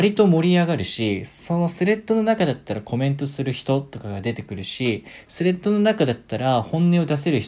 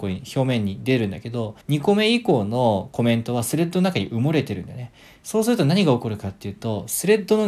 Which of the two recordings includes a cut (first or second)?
second